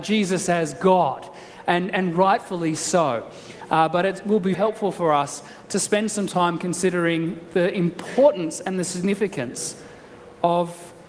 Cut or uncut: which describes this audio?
cut